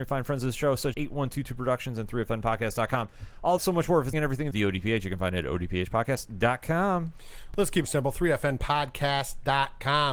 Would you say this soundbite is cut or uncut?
cut